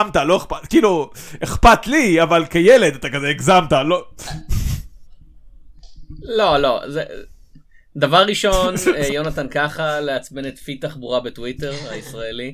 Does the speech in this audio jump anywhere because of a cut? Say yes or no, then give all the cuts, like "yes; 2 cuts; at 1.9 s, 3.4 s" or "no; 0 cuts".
no; 0 cuts